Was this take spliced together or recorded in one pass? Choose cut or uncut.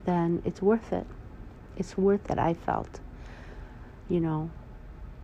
cut